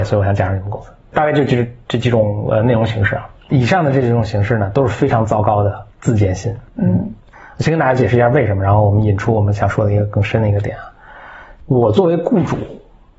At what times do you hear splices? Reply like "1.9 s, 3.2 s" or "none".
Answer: 5.9 s, 6.7 s